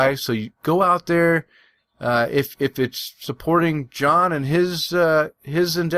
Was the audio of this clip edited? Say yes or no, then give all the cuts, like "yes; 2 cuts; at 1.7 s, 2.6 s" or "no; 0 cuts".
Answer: no; 0 cuts